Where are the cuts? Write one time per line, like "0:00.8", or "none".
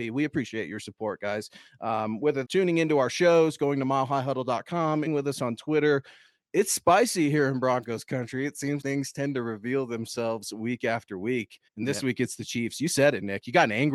0:02.4
0:05.1
0:08.8
0:11.7